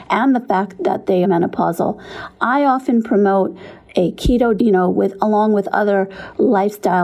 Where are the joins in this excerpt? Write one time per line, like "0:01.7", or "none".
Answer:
0:01.2
0:04.6